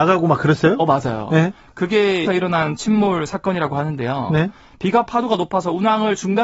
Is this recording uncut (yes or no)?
no